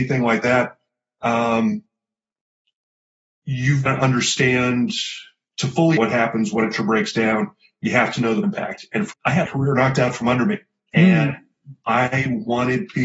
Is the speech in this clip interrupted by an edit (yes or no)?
yes